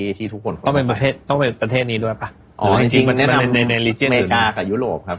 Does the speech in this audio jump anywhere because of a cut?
no; 0 cuts

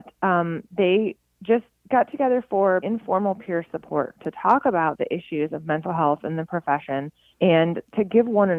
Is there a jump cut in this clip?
yes; 3 cuts; at 1.7 s, 2.8 s, 7.3 s

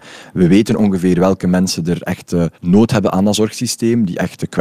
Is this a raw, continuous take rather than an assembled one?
no; 1 cut; at 2.5 s

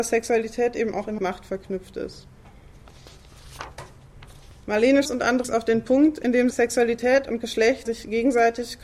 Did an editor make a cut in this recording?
yes; 5 cuts; at 1.2 s, 5.1 s, 5.4 s, 6.5 s, 7.9 s

